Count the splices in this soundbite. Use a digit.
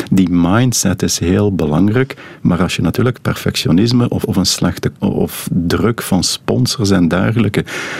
3